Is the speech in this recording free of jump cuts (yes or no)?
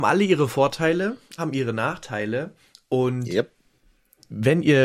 no